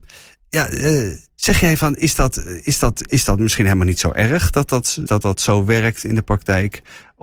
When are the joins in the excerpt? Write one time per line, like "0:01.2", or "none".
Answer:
0:01.3
0:05.1